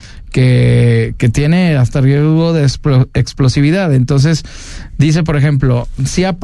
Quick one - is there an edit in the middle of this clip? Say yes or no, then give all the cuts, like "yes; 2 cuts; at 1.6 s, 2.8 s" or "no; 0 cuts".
no; 0 cuts